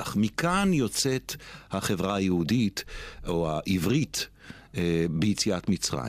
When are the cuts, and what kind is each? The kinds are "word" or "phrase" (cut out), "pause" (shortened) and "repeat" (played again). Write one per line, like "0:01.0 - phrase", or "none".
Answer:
none